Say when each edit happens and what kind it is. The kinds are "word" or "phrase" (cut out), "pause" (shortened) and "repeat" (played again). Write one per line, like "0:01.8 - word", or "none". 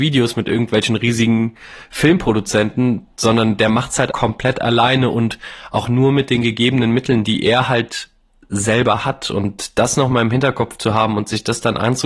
0:04.1 - word
0:05.8 - word